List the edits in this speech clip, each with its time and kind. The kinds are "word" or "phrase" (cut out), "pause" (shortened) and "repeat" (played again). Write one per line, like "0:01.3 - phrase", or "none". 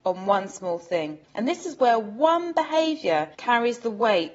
0:01.2 - pause
0:03.3 - pause